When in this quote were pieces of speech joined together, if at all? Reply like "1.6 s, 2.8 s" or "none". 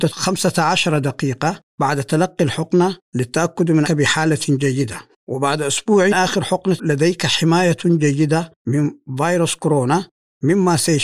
1.7 s, 3.0 s, 3.8 s, 5.2 s, 6.1 s, 6.8 s, 8.6 s